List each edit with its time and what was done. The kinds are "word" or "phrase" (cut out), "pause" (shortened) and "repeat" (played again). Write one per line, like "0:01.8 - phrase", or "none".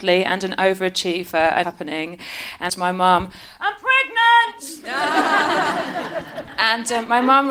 0:01.6 - phrase
0:02.7 - phrase